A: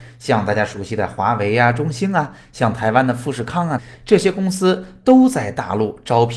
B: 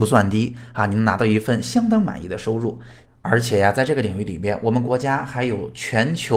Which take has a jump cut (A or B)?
A